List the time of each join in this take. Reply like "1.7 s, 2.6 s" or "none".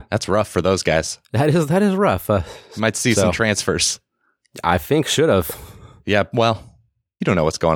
none